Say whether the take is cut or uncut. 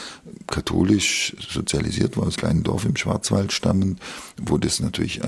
cut